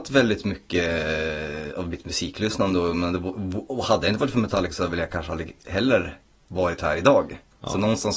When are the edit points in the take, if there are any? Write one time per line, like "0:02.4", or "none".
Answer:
none